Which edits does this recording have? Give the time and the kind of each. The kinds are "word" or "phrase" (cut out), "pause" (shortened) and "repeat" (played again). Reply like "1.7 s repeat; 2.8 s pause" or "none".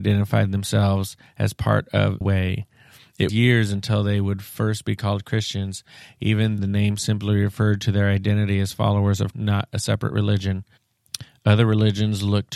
2.2 s word; 3.3 s word; 6.6 s word; 9.3 s word

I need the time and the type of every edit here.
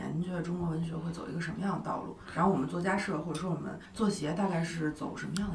3.8 s pause

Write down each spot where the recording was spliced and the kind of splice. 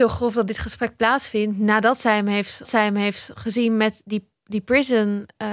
2.6 s repeat

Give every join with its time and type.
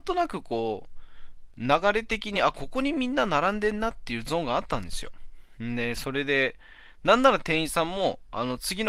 none

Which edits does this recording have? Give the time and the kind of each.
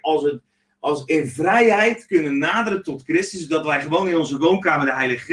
none

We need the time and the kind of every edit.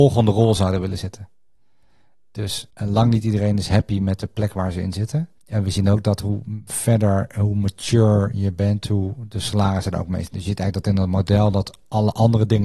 2.7 s pause; 5.4 s pause

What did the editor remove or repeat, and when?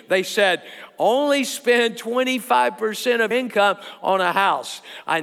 3.3 s word

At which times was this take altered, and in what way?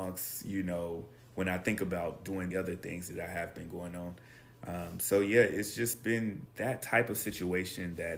2.5 s phrase; 6.5 s word

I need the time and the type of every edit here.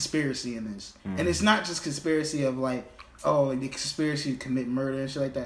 1.0 s pause

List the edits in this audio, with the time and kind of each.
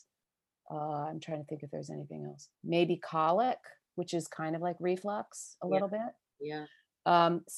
2.5 s pause

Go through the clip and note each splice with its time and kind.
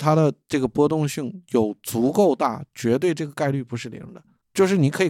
none

